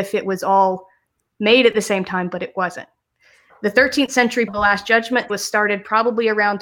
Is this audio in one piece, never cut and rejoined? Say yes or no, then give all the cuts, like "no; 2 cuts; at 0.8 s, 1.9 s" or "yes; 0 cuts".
no; 2 cuts; at 4.5 s, 5.3 s